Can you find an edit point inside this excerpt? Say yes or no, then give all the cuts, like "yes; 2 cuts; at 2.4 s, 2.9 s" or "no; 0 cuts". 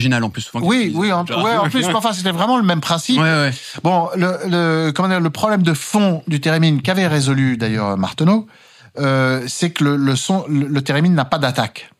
no; 0 cuts